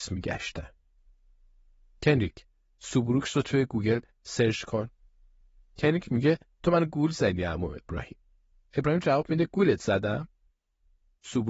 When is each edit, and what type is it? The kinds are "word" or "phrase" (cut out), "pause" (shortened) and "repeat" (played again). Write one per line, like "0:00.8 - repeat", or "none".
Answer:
none